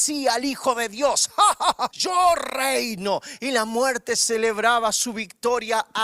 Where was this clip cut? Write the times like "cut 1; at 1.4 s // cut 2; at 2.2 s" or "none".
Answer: cut 1; at 1.9 s